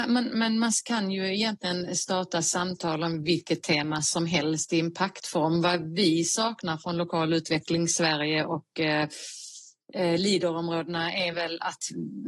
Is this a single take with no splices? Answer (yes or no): yes